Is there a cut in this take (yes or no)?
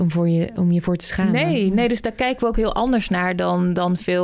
no